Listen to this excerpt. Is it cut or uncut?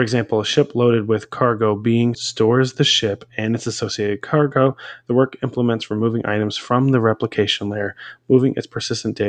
cut